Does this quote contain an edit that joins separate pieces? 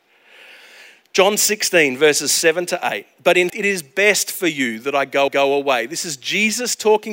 yes; 2 cuts; at 3.5 s, 5.3 s

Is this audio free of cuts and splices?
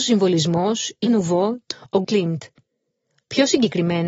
no; 3 cuts; at 1.1 s, 1.7 s, 2.0 s

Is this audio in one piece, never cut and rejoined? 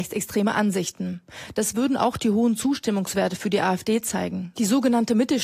yes; 0 cuts

